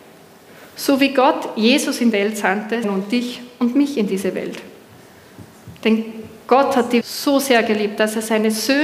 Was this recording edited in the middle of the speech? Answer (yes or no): yes